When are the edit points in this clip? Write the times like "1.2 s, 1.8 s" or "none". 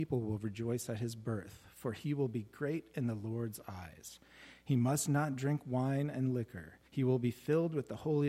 6.9 s